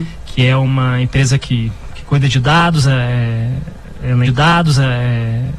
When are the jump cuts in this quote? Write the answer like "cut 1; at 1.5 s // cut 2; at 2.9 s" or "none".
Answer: cut 1; at 4.3 s